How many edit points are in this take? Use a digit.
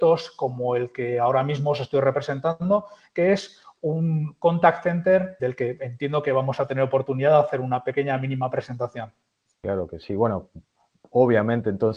1